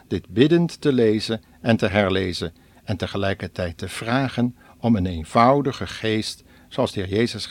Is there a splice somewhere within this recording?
no; 0 cuts

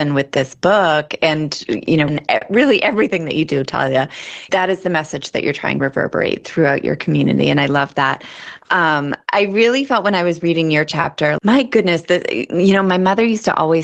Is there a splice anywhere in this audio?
yes; 3 cuts; at 2.1 s, 5.8 s, 11.4 s

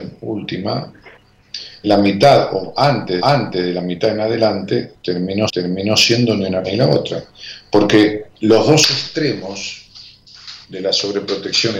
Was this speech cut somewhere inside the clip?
yes; 6 cuts; at 1.8 s, 3.2 s, 5.5 s, 6.6 s, 8.3 s, 10.6 s

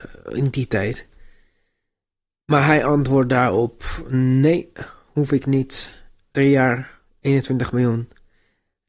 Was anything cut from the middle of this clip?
no; 0 cuts

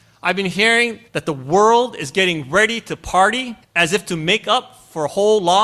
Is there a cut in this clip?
yes; 2 cuts; at 1.1 s, 3.6 s

